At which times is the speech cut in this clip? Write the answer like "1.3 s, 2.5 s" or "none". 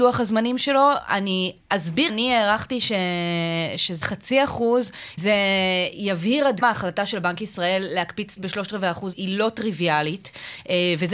2.1 s, 4.0 s, 5.2 s, 6.6 s, 8.4 s, 9.1 s